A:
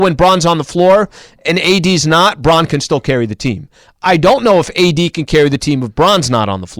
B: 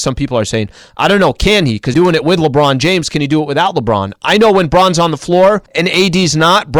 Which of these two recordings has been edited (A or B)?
B